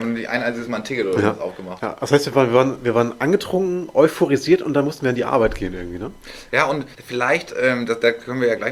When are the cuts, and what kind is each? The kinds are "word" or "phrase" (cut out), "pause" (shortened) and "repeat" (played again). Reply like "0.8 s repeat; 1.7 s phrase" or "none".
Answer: 6.9 s pause

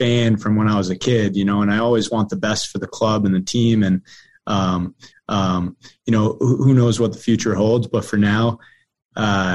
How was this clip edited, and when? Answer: 5.1 s repeat

